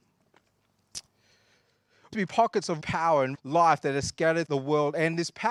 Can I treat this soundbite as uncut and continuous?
no; 4 cuts; at 2.1 s, 2.8 s, 3.3 s, 4.5 s

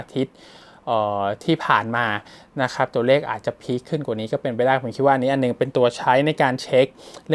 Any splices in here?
no; 0 cuts

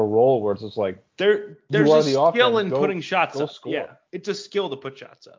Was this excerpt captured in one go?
no; 2 cuts; at 1.1 s, 4.1 s

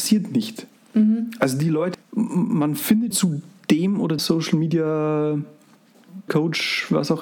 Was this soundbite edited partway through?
yes; 4 cuts; at 1.9 s, 3.1 s, 4.2 s, 6.3 s

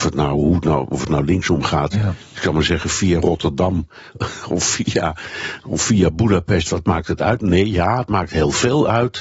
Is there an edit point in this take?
no; 0 cuts

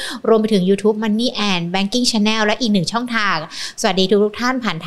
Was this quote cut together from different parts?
no; 0 cuts

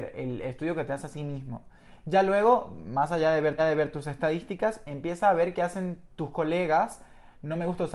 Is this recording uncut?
no; 3 cuts; at 1.1 s, 3.6 s, 6.1 s

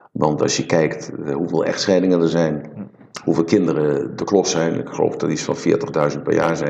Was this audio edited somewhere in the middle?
no; 0 cuts

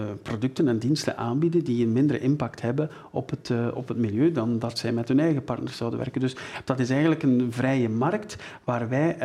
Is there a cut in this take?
no; 0 cuts

